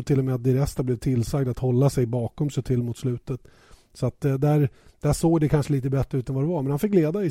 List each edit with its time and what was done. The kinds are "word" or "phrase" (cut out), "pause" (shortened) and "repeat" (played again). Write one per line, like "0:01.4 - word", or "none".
none

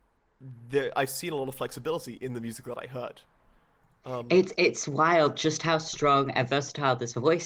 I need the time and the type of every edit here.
none

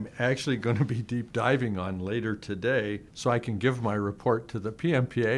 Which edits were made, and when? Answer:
0:03.1 - pause

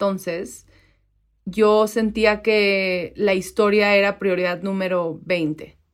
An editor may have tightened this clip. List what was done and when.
none

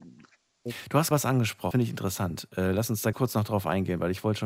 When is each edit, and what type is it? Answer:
0:01.1 - word
0:01.7 - word
0:03.1 - word

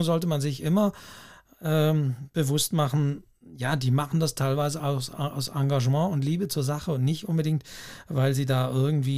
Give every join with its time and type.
none

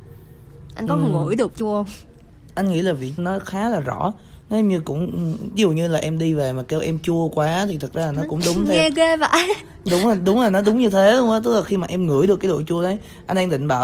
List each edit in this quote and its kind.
0:01.5 - word
0:03.2 - word
0:09.9 - word

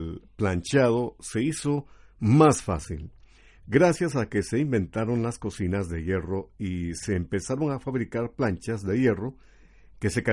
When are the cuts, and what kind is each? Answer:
none

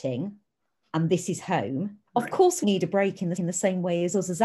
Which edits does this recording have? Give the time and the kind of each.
0:02.1 - pause
0:02.6 - word
0:03.4 - repeat

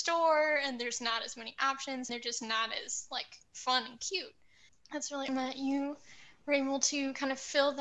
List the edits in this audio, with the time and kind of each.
0:02.1 - word
0:04.7 - word
0:05.3 - word

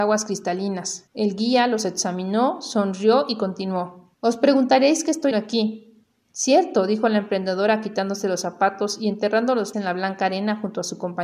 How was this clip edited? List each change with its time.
0:01.1 - pause
0:04.1 - pause
0:05.3 - word
0:09.7 - word

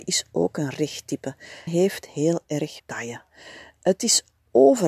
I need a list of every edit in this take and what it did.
0:01.7 - word
0:02.8 - word

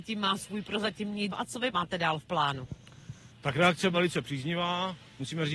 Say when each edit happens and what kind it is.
0:01.3 - word
0:01.7 - word
0:03.3 - pause
0:03.9 - word

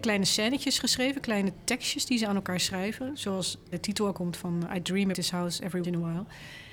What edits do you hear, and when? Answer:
0:03.7 - word
0:04.1 - word
0:05.1 - word
0:05.8 - word

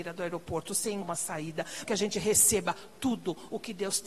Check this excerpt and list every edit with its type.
0:01.0 - word
0:01.9 - word

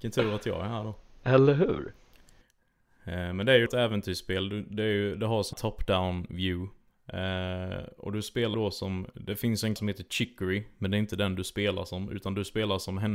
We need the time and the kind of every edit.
0:03.7 - word
0:05.5 - word
0:08.5 - word
0:09.8 - word

